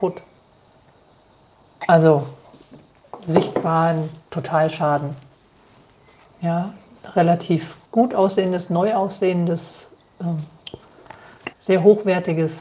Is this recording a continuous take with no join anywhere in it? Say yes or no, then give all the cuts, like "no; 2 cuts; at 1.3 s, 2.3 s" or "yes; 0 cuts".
no; 3 cuts; at 4.2 s, 7.9 s, 11.5 s